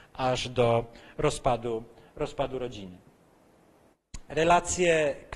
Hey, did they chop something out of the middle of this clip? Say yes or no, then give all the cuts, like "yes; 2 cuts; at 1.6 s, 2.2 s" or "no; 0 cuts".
no; 0 cuts